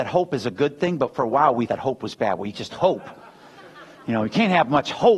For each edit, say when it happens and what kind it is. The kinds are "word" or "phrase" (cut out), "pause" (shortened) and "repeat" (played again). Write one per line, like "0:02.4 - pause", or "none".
0:01.7 - word
0:02.5 - word